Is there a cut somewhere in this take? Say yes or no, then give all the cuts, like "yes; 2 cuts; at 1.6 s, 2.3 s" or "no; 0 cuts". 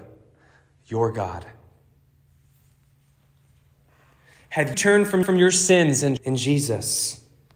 yes; 3 cuts; at 4.7 s, 5.2 s, 6.2 s